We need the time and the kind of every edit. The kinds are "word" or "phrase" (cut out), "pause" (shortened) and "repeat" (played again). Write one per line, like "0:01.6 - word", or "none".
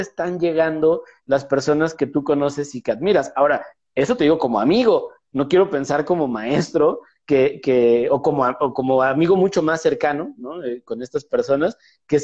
none

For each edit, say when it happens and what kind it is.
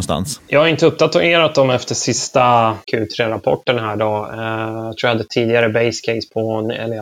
0:02.8 - pause

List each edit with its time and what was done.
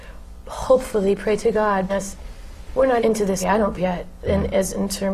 0:01.9 - word
0:03.0 - word
0:03.4 - word
0:03.8 - word

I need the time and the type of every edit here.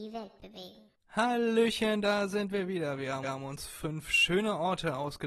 0:01.0 - pause
0:03.2 - repeat

